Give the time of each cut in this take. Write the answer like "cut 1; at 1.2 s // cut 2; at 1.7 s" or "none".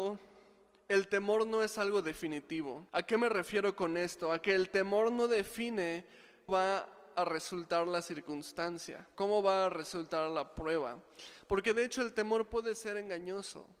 cut 1; at 2.9 s // cut 2; at 6.5 s // cut 3; at 9.1 s